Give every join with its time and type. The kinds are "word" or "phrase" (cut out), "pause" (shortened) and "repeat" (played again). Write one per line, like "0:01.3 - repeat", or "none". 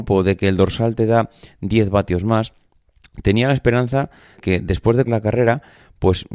0:04.3 - word
0:05.1 - word